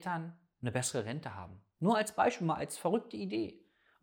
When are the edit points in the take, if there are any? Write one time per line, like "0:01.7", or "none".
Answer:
none